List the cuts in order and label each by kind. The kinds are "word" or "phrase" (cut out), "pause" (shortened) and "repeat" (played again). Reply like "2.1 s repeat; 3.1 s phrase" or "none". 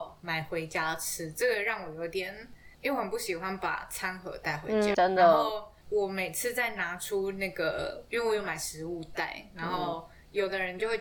4.9 s word